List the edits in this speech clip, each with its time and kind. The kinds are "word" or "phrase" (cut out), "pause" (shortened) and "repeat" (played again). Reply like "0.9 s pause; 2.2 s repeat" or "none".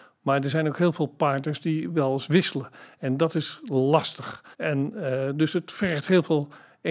4.5 s pause